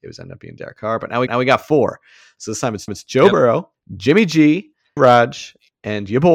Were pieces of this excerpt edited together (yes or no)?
yes